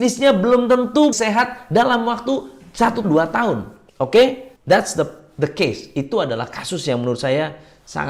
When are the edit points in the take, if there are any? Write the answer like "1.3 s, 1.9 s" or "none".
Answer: 1.1 s, 3.0 s, 3.9 s, 4.6 s